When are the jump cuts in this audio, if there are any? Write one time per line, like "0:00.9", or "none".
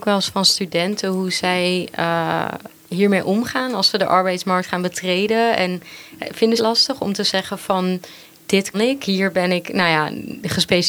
0:06.6
0:08.7